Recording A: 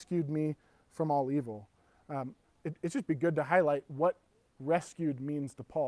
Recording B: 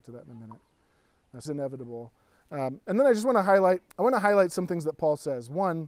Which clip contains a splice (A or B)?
B